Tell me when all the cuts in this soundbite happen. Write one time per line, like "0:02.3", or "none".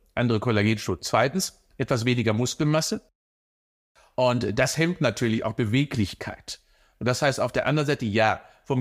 none